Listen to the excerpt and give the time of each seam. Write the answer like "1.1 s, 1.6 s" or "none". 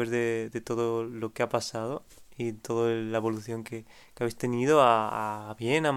none